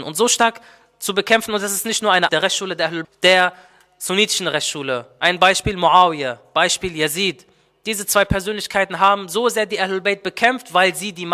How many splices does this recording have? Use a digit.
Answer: 2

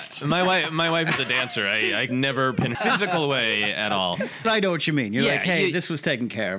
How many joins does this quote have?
3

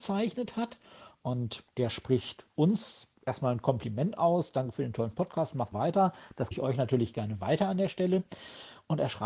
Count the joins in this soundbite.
3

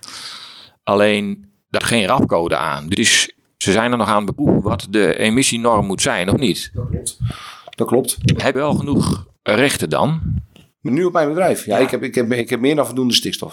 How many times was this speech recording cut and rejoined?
5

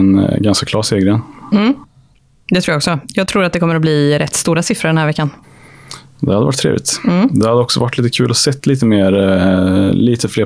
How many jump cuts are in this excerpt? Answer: 1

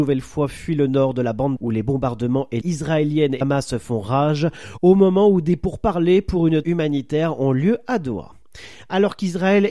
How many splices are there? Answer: 4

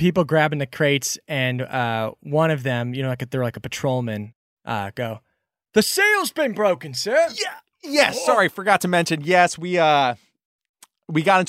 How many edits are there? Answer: 0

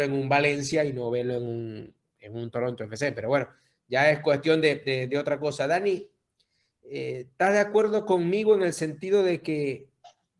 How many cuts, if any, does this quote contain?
0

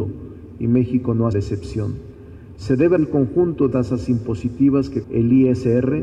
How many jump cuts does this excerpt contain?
4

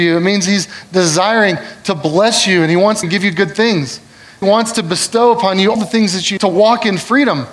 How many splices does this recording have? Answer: 4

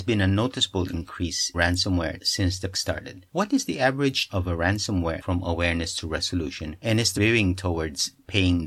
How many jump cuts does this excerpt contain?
6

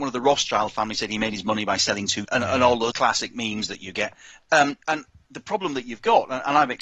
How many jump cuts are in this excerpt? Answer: 3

